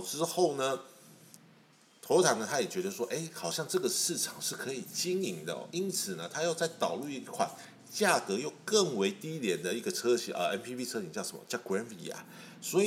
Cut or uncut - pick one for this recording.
uncut